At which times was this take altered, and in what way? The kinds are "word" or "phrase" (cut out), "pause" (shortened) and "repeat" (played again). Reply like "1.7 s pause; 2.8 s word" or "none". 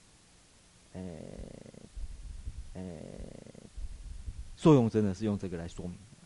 2.7 s repeat